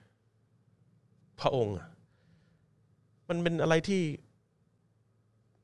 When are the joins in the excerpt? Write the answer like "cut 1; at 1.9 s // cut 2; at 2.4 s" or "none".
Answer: none